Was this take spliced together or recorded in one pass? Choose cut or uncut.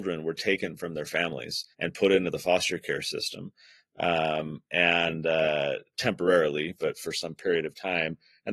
cut